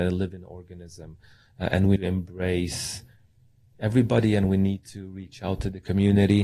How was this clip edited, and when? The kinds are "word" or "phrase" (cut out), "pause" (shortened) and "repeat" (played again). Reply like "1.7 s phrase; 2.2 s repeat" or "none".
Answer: 2.0 s phrase